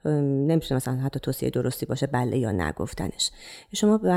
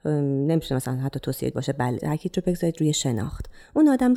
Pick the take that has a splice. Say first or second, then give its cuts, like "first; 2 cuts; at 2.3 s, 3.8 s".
second; 2 cuts; at 1.5 s, 2.0 s